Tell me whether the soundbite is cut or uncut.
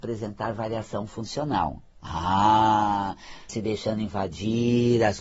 cut